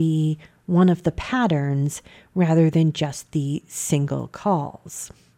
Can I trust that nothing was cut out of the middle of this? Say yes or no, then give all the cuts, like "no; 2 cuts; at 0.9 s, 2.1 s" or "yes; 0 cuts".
yes; 0 cuts